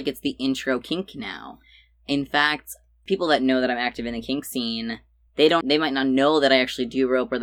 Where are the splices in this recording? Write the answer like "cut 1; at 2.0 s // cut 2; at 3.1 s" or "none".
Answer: cut 1; at 5.6 s